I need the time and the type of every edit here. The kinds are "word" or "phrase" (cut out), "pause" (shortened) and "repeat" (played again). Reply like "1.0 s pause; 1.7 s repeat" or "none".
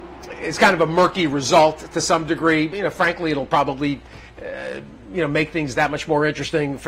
none